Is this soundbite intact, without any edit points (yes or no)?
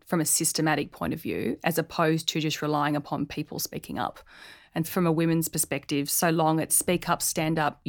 no